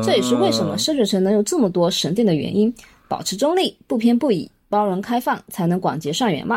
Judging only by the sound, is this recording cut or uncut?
uncut